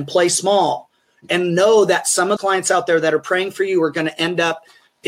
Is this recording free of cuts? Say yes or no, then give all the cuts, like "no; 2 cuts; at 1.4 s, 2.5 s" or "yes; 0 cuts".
no; 1 cut; at 2.4 s